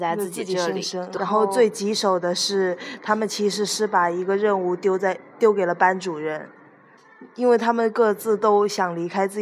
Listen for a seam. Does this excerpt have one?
yes; 1 cut; at 1.2 s

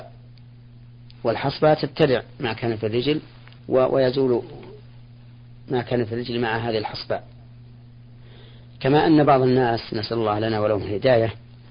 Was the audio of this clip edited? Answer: yes; 1 cut; at 3.6 s

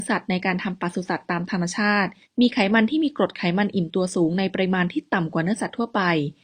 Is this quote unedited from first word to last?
no; 1 cut; at 2.2 s

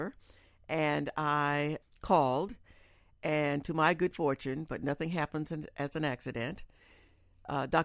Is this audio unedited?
yes; 0 cuts

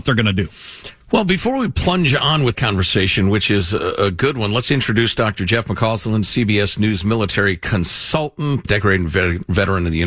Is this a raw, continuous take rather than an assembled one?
no; 3 cuts; at 1.0 s, 2.5 s, 8.6 s

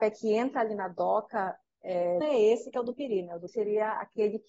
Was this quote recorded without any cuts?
no; 2 cuts; at 2.2 s, 3.5 s

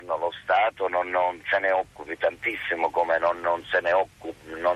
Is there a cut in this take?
no; 0 cuts

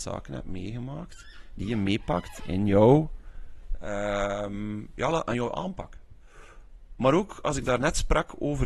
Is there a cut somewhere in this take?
no; 0 cuts

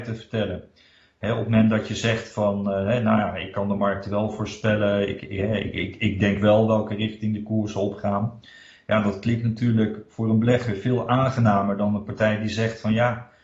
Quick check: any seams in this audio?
no; 0 cuts

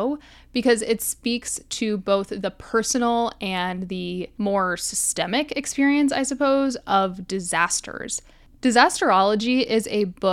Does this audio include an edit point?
no; 0 cuts

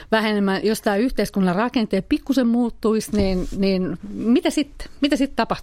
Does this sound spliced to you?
no; 0 cuts

